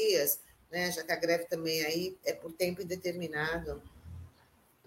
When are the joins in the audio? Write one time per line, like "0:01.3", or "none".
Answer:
none